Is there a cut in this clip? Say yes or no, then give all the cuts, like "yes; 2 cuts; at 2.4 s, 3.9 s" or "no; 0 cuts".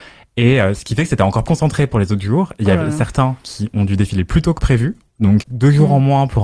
yes; 2 cuts; at 1.5 s, 5.4 s